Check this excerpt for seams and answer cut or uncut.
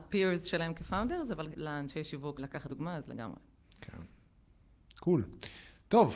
cut